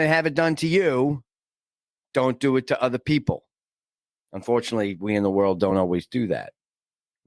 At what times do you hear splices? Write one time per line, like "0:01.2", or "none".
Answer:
none